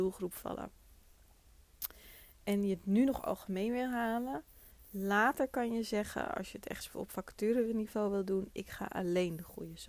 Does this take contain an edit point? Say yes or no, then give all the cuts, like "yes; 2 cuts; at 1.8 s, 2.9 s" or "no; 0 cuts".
no; 0 cuts